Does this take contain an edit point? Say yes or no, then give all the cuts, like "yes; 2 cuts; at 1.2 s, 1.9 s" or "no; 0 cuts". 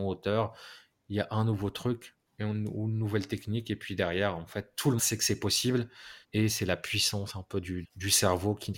yes; 4 cuts; at 2.3 s, 5.0 s, 6.2 s, 7.8 s